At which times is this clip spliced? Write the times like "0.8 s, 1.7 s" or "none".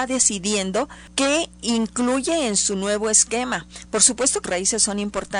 4.4 s